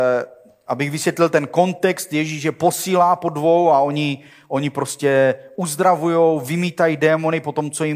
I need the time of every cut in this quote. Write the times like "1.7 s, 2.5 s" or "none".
none